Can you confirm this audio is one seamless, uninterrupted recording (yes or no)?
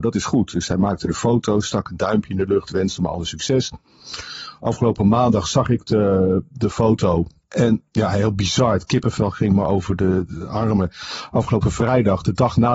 no